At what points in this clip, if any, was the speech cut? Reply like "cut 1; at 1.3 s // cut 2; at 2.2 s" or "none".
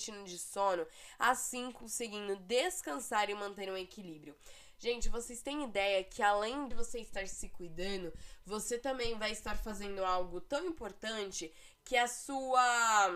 cut 1; at 6.7 s